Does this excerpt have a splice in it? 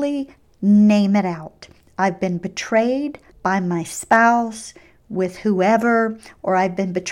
no; 0 cuts

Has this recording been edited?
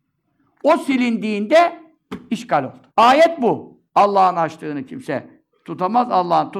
yes; 2 cuts; at 2.9 s, 3.9 s

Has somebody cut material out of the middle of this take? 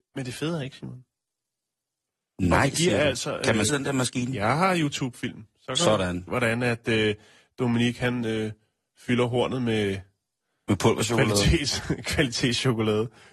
yes; 2 cuts; at 3.7 s, 6.3 s

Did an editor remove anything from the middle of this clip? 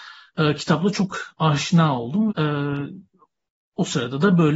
yes; 1 cut; at 2.3 s

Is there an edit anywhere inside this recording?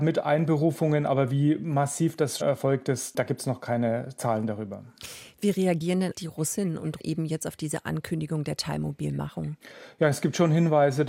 yes; 3 cuts; at 2.4 s, 6.1 s, 7.0 s

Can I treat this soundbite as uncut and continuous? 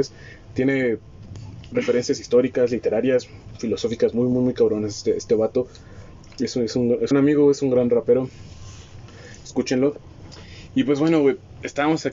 no; 1 cut; at 7.1 s

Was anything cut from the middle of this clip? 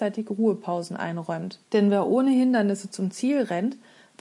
yes; 1 cut; at 1.6 s

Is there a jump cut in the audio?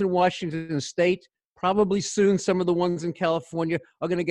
no; 0 cuts

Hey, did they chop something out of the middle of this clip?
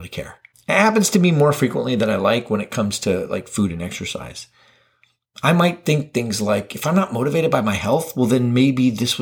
no; 0 cuts

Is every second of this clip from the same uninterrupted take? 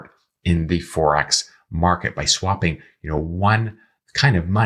yes; 0 cuts

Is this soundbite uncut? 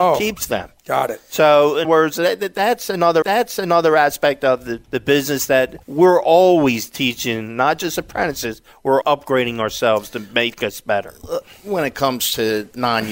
no; 5 cuts; at 1.8 s, 3.2 s, 4.8 s, 5.8 s, 9.0 s

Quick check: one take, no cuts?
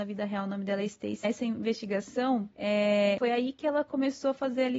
no; 2 cuts; at 1.2 s, 2.5 s

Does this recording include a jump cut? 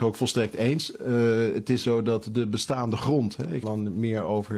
yes; 2 cuts; at 1.8 s, 3.6 s

